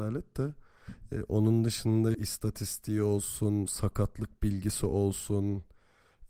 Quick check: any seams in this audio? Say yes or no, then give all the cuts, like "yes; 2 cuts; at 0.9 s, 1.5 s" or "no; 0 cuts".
yes; 1 cut; at 2.1 s